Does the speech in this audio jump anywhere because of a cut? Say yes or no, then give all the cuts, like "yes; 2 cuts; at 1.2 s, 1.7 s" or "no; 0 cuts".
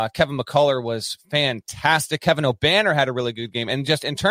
no; 0 cuts